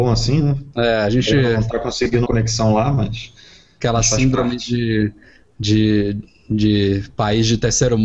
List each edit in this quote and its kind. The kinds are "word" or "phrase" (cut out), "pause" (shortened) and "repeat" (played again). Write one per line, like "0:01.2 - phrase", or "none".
0:02.3 - phrase

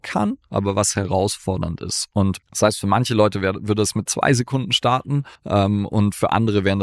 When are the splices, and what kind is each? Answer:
0:02.4 - pause
0:05.4 - pause

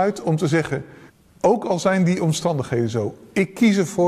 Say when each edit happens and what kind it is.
0:01.1 - pause

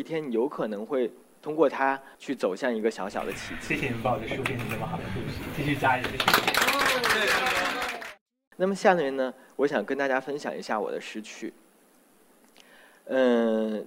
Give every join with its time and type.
0:02.1 - pause

